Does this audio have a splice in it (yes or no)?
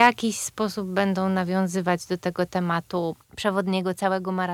no